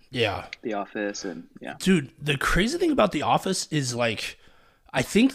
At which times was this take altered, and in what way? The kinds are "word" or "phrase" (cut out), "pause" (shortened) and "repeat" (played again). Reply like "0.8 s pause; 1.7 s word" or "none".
none